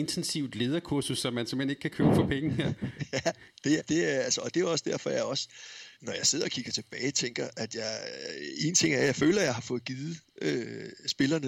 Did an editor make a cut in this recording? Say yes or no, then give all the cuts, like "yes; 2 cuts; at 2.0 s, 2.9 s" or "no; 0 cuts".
yes; 2 cuts; at 3.8 s, 6.0 s